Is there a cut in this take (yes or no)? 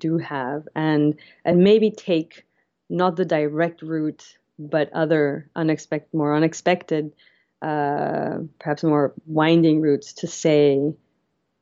no